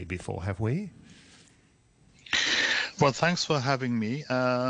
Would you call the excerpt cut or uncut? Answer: uncut